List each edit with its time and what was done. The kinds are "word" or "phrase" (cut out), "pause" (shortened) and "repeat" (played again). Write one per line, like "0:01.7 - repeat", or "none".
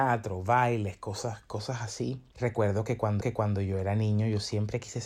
0:03.2 - repeat

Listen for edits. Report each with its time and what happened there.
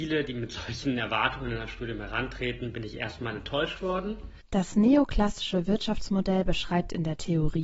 none

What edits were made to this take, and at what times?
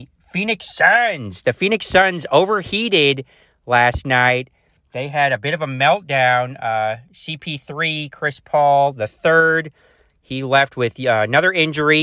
none

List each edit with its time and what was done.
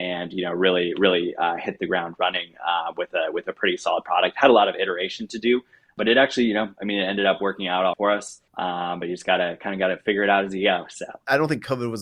0:07.9 - word
0:08.5 - pause

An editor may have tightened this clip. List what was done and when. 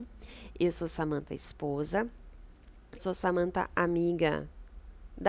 0:03.0 - word

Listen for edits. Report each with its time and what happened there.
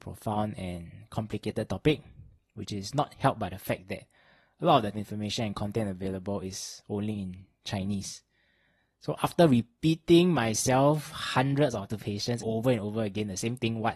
0:04.9 - word
0:11.9 - word
0:12.4 - word

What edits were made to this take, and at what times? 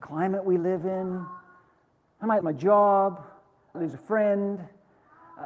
0:02.4 - word
0:03.7 - word

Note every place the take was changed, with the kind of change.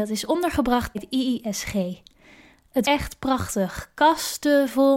0:00.9 - word
0:02.8 - word

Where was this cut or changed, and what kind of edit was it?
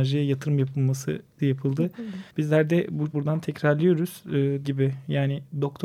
0:01.4 - word
0:02.3 - pause
0:03.1 - word
0:04.6 - word

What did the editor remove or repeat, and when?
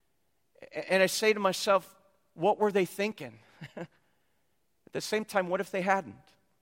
none

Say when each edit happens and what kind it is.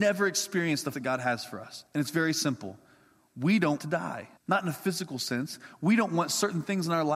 0:00.9 - word
0:01.9 - pause
0:03.8 - word
0:04.4 - pause

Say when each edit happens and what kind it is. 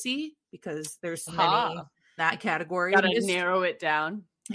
0:01.3 - word
0:02.2 - word

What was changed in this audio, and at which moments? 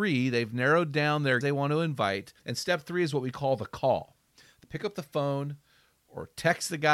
0:01.4 - word
0:02.4 - pause
0:04.6 - word

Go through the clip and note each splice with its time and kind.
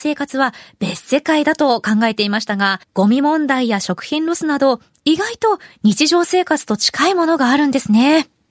0:02.8 - pause

